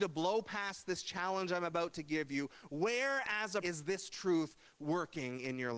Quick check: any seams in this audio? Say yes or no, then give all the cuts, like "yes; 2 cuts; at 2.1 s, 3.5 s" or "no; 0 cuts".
yes; 1 cut; at 3.6 s